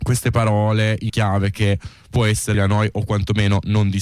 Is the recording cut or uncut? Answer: cut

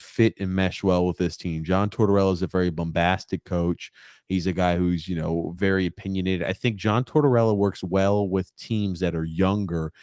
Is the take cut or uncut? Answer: uncut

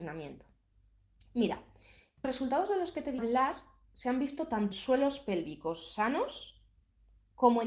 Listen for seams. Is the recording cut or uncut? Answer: cut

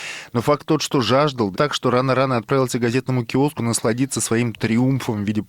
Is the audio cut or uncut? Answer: cut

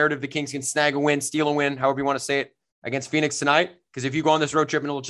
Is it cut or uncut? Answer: uncut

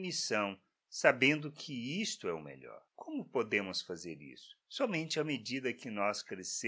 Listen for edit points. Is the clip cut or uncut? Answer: uncut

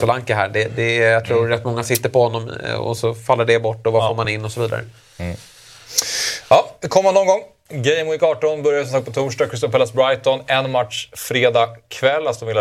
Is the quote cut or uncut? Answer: uncut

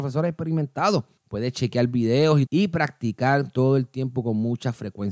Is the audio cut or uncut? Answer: cut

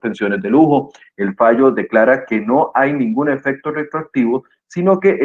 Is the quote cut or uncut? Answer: uncut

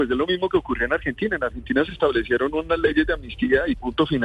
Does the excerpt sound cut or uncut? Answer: uncut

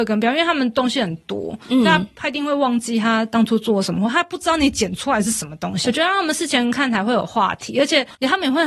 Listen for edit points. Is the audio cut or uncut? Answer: cut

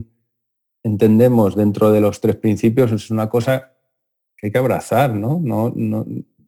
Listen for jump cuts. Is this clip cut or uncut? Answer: uncut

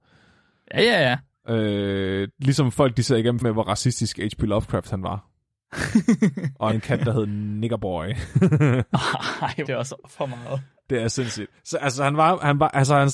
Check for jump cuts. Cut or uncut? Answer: cut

